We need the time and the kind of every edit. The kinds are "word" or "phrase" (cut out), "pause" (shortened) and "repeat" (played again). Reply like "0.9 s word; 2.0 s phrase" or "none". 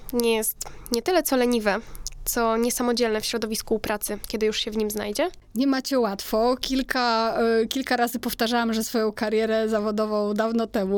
8.8 s word